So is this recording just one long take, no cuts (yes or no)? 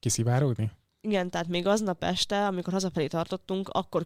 yes